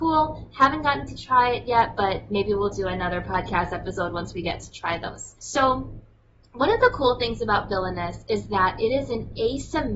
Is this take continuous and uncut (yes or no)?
no